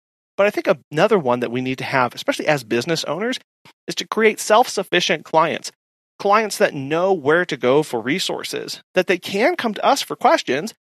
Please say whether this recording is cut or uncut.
uncut